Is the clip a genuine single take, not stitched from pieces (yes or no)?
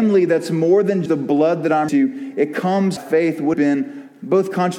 no